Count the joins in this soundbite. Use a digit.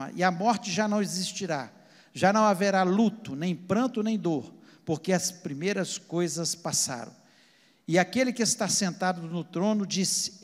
0